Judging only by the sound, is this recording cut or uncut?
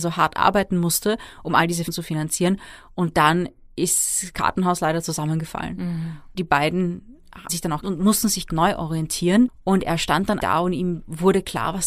cut